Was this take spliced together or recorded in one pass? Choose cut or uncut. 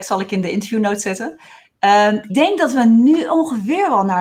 cut